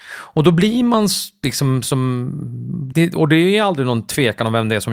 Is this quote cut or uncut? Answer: cut